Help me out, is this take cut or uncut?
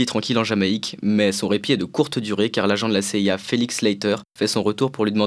uncut